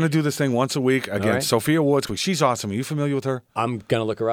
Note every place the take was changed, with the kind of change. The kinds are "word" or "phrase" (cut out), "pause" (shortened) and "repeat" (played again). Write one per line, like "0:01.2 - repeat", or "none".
0:02.1 - phrase